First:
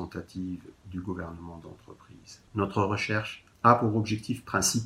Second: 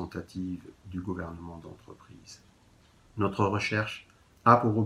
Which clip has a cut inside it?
first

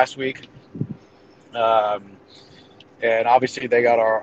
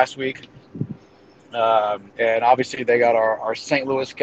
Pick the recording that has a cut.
second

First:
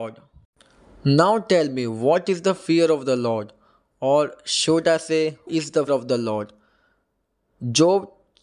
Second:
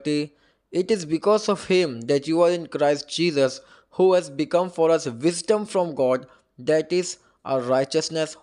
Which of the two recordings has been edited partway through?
first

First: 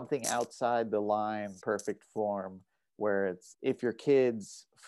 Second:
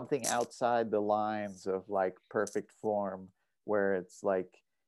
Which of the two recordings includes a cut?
first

